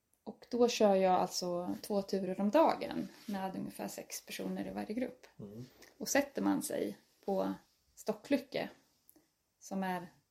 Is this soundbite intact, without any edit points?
yes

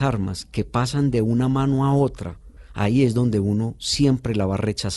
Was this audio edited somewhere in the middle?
no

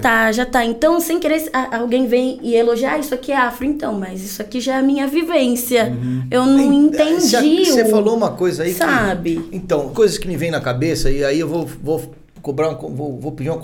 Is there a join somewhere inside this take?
yes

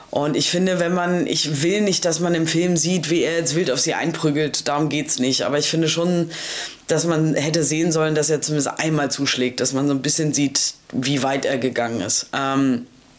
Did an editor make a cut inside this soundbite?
no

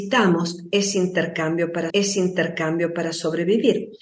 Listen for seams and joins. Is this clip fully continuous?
no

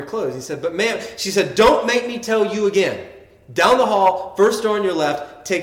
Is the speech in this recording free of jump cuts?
yes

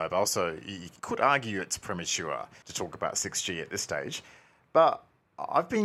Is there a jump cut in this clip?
yes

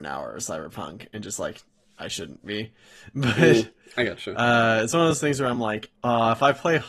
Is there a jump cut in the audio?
no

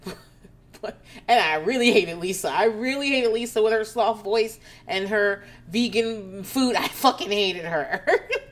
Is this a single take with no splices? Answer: yes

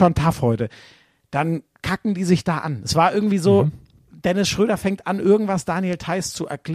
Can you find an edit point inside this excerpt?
no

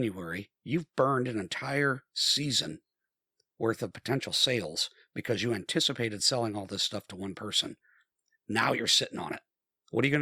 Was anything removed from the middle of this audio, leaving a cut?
no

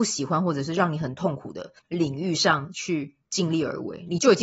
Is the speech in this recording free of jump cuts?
no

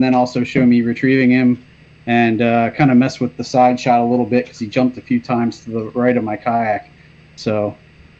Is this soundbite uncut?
yes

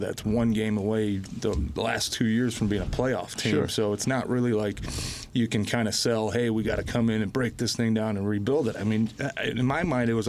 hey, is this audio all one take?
yes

